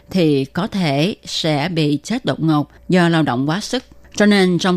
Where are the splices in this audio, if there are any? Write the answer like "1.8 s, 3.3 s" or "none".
none